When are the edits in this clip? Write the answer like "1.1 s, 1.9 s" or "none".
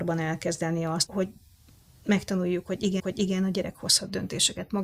1.1 s, 3.0 s